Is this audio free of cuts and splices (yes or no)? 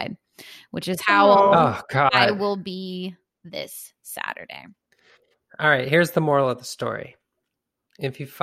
yes